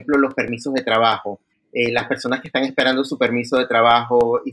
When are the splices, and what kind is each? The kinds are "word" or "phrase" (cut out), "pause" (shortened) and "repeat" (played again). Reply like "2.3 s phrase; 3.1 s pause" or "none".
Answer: 1.5 s pause